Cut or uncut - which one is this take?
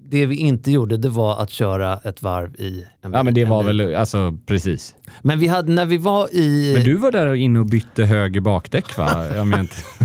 cut